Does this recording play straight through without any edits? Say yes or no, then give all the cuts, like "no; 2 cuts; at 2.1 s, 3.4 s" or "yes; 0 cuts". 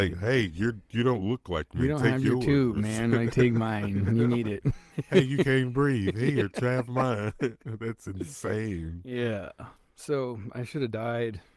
yes; 0 cuts